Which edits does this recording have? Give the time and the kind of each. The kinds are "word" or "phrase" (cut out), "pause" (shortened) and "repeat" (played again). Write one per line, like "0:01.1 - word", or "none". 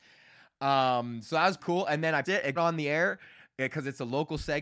0:01.6 - word
0:02.2 - word
0:02.6 - word

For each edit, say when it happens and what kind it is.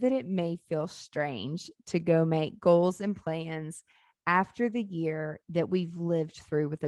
none

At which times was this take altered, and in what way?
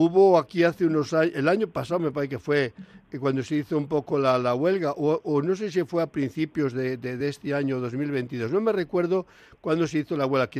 none

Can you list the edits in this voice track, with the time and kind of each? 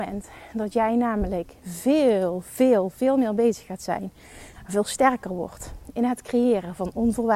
0:01.6 - pause

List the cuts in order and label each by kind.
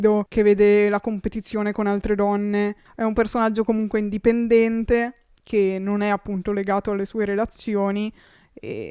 none

